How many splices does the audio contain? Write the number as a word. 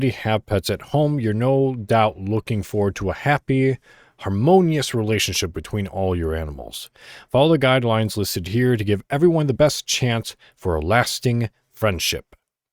zero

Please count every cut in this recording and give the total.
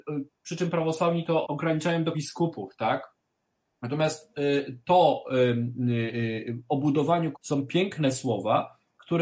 three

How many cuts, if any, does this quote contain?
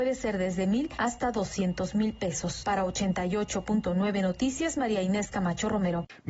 zero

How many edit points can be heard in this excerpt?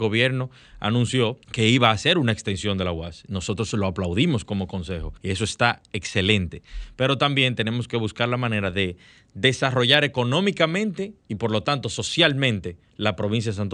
three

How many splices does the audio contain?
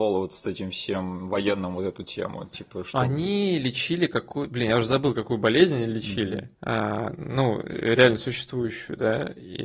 one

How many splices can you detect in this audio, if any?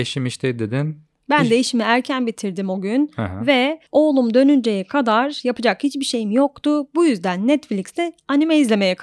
one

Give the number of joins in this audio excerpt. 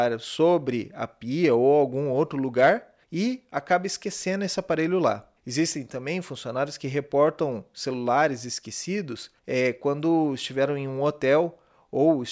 three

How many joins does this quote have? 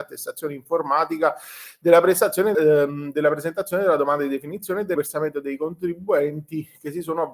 two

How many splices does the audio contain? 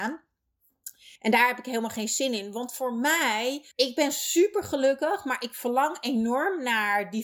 two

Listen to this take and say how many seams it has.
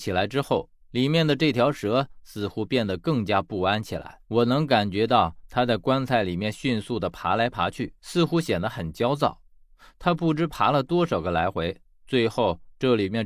two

